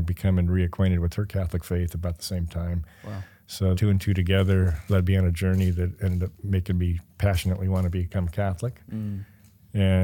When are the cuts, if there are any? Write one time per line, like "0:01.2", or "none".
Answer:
0:03.8
0:04.9